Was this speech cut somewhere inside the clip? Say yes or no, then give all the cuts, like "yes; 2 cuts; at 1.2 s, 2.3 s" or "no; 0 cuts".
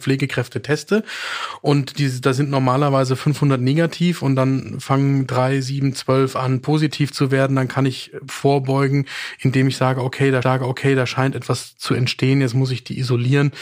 yes; 1 cut; at 10.4 s